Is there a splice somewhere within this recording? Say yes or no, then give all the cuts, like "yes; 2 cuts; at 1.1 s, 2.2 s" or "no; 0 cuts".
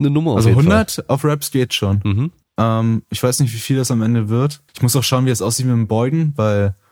yes; 2 cuts; at 2.4 s, 4.7 s